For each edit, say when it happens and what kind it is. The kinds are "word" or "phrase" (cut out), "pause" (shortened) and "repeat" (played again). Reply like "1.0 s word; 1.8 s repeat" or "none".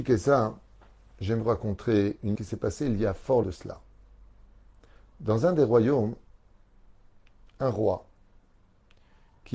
1.4 s word; 2.3 s word; 3.4 s word

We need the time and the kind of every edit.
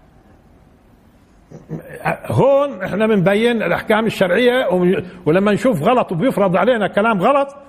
none

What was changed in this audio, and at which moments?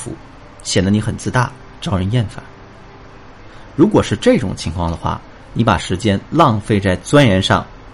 none

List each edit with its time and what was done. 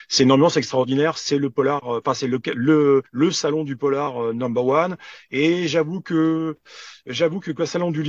3.1 s pause

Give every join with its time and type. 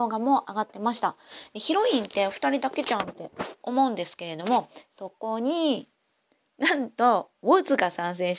6.3 s pause

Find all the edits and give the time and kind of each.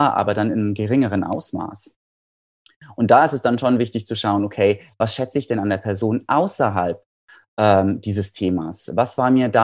none

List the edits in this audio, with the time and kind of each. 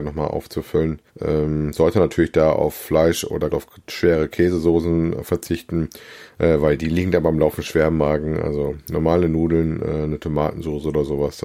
1.1 s pause; 3.5 s phrase

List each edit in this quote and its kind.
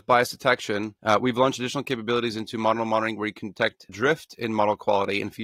1.0 s pause; 3.9 s word

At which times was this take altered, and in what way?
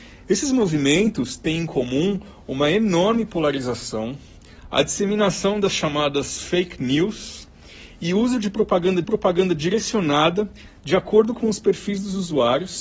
9.0 s repeat

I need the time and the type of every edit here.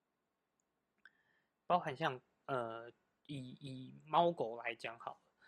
none

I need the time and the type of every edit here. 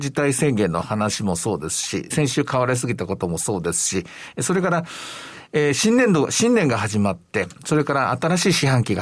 2.1 s word

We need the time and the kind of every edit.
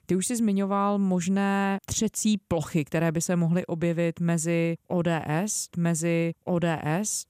5.7 s repeat

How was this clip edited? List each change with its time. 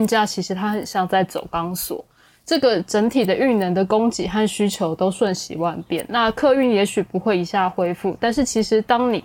none

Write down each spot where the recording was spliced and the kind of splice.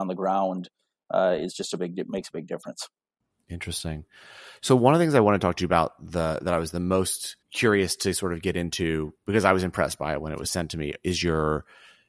7.4 s pause

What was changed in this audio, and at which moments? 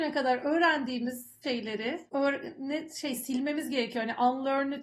1.4 s word; 2.1 s word

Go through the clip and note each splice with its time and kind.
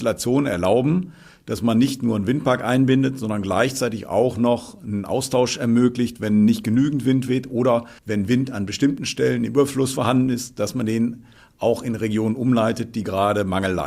8.0 s pause

